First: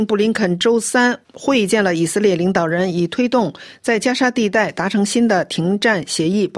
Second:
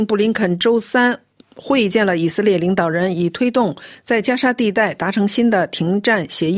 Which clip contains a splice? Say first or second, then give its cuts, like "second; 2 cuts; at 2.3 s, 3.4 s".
first; 1 cut; at 1.2 s